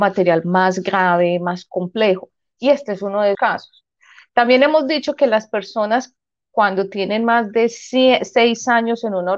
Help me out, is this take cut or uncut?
cut